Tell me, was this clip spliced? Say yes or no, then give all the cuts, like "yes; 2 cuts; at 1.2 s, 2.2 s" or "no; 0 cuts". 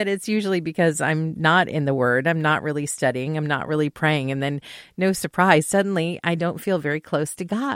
no; 0 cuts